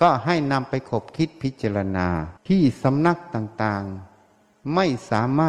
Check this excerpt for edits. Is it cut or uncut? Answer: cut